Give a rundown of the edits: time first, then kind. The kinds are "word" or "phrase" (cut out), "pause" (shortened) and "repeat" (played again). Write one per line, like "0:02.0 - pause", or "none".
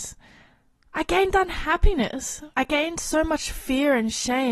0:02.5 - pause